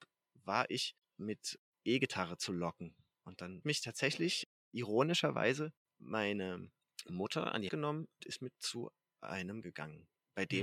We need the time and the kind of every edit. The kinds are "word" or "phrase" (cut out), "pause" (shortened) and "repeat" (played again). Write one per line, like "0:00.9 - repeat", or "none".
0:01.0 - word
0:03.6 - word
0:07.7 - word
0:08.2 - word
0:08.5 - word
0:09.6 - word